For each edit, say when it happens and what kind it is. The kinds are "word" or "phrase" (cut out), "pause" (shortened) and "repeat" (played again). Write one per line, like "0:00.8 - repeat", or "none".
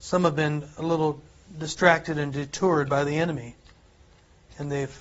none